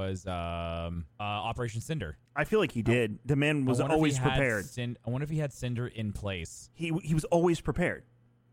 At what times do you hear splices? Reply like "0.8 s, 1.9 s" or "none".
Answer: 1.1 s, 2.3 s